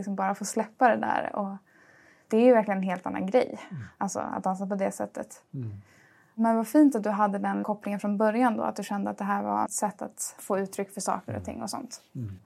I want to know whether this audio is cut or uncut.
cut